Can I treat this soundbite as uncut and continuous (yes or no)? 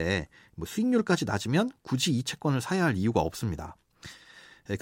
yes